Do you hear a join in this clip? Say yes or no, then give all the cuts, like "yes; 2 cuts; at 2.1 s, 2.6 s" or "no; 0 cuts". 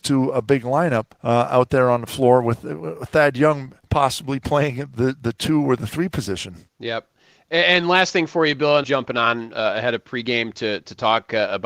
yes; 4 cuts; at 1.1 s, 3.8 s, 6.7 s, 8.8 s